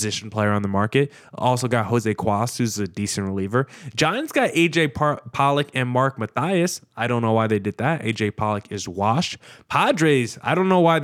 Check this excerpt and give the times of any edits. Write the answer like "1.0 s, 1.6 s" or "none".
none